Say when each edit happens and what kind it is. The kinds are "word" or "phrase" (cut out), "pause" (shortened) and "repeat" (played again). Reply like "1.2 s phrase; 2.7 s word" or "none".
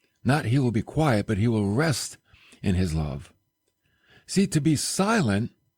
none